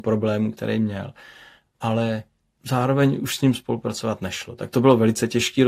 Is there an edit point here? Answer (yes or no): no